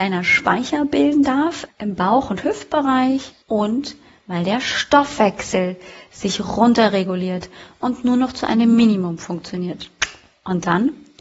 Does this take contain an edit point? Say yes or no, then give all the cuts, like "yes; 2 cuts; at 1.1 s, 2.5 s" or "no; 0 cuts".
yes; 2 cuts; at 1.7 s, 3.4 s